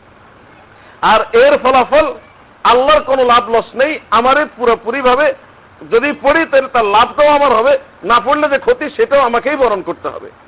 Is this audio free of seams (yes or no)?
yes